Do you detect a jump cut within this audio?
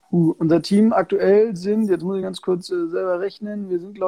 no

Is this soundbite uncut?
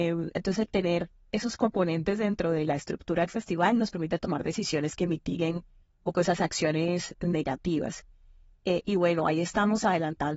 yes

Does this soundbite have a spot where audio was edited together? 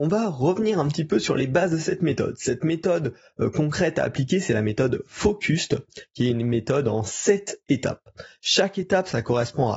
no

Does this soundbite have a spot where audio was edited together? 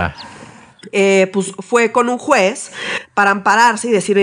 no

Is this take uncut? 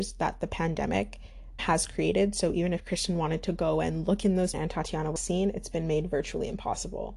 no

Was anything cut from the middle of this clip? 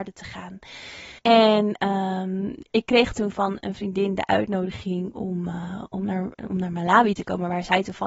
yes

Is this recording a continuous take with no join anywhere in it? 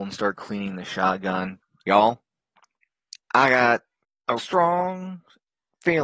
no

